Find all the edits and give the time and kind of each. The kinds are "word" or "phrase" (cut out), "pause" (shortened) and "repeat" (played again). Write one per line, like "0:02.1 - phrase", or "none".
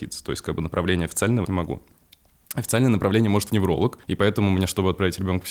0:01.4 - phrase
0:03.5 - word
0:04.0 - pause